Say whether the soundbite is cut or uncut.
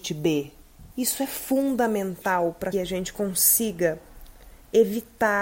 cut